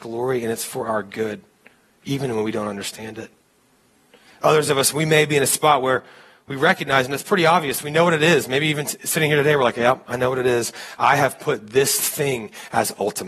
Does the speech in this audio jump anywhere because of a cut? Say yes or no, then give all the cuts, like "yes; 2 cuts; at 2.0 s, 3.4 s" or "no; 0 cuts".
no; 0 cuts